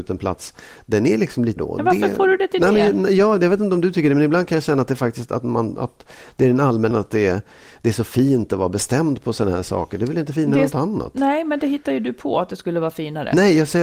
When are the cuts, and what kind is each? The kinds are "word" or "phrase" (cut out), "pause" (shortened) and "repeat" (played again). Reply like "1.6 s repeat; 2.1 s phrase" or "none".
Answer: 1.6 s word; 6.9 s word